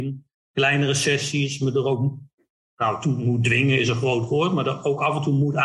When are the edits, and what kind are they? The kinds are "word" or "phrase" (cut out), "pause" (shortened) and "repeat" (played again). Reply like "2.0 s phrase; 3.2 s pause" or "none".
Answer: none